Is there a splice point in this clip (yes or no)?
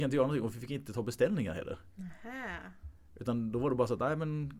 no